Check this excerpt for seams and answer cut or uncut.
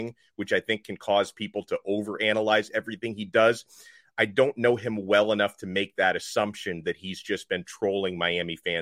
uncut